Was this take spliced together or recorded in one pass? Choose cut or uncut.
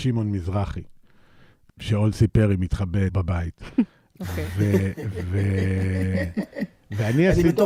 cut